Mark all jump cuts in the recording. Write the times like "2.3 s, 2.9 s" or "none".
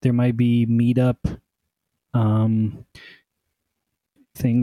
none

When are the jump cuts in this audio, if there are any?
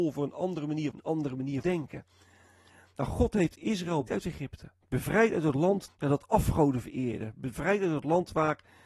0.9 s, 1.6 s, 4.1 s, 4.8 s, 5.9 s

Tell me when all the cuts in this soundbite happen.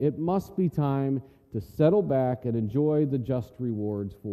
none

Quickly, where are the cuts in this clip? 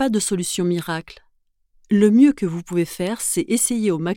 none

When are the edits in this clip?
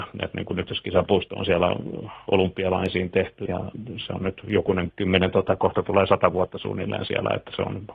3.5 s, 4.9 s

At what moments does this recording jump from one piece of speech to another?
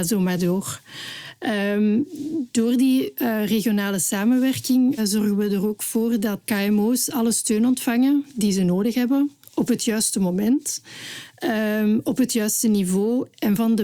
5.0 s

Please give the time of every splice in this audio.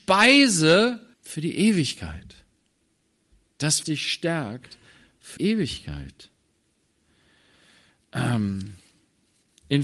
1.1 s, 3.8 s, 5.4 s

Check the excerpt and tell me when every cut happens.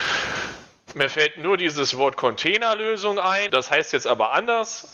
3.5 s

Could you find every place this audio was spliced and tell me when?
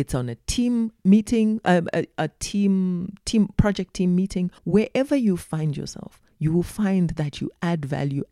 4.6 s

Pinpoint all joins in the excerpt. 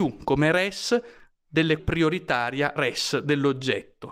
1.8 s, 2.8 s

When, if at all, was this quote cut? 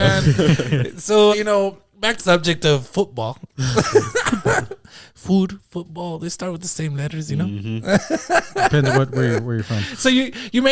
1.3 s, 2.2 s

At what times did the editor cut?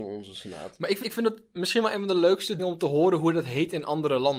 1.0 s, 2.6 s

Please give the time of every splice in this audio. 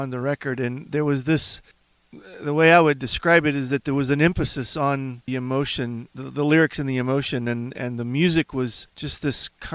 5.3 s

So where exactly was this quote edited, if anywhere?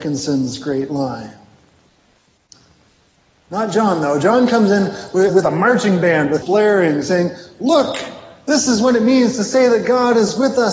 5.3 s, 6.4 s

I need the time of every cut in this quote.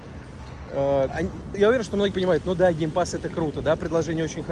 1.1 s, 1.5 s, 2.1 s

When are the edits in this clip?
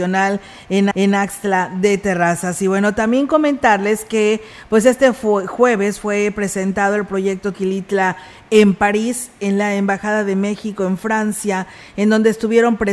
0.9 s, 7.5 s

